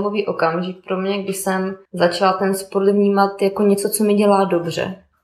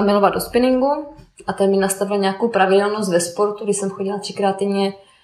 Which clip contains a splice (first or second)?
first